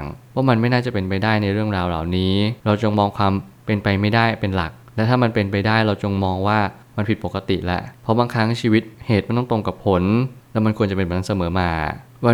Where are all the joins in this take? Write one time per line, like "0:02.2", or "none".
0:02.6